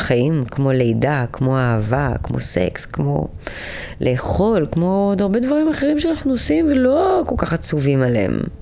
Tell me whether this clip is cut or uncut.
uncut